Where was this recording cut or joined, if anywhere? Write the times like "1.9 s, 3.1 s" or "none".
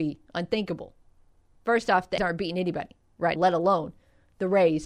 2.2 s, 3.4 s